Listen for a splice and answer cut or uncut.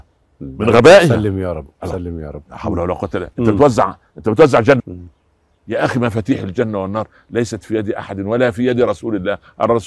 cut